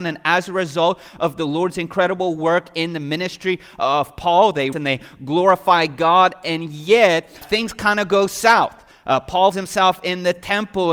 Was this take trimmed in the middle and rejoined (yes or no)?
yes